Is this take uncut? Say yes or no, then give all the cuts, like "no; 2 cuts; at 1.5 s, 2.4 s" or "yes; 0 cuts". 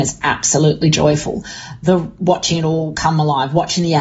yes; 0 cuts